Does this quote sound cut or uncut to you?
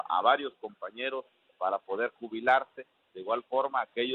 uncut